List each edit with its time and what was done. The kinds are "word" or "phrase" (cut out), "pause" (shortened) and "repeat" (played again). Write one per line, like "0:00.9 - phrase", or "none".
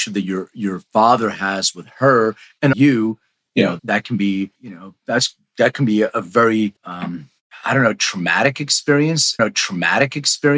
0:02.7 - phrase
0:03.8 - word
0:04.6 - word
0:06.8 - pause
0:09.4 - repeat